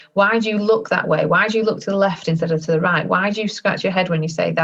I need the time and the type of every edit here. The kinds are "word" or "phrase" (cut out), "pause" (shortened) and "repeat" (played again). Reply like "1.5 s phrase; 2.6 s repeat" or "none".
none